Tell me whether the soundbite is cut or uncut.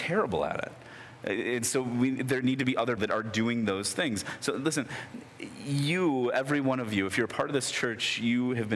cut